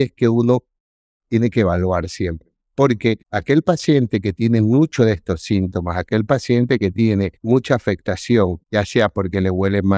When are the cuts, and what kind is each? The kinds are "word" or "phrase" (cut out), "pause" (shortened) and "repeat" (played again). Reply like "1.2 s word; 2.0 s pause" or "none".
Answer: 3.2 s pause; 7.4 s pause; 8.6 s pause